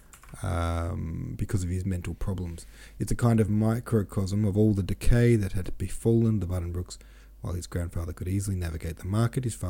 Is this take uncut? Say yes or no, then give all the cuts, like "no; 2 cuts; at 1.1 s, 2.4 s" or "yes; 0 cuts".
yes; 0 cuts